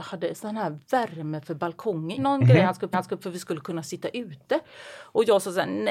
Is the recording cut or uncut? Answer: cut